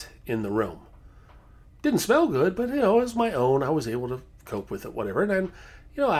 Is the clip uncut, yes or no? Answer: yes